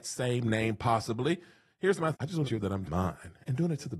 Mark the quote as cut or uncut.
cut